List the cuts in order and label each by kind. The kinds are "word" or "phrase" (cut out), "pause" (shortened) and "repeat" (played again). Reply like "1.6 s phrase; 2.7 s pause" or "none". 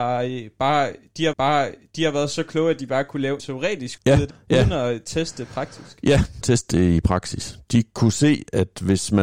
1.3 s repeat; 3.4 s word; 4.0 s word; 4.3 s word; 6.4 s phrase